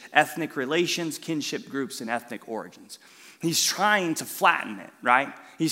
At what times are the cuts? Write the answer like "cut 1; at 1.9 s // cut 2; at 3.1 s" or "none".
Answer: none